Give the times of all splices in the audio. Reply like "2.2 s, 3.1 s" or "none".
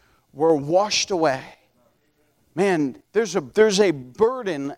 3.0 s, 3.5 s